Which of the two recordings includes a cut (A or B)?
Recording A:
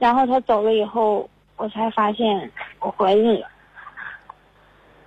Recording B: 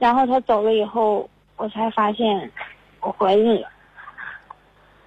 A